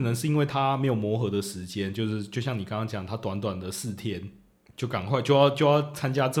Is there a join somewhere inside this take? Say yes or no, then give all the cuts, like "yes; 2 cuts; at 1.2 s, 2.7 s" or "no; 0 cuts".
yes; 1 cut; at 4.7 s